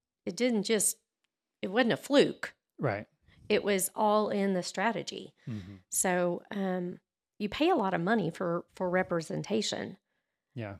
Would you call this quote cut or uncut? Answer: uncut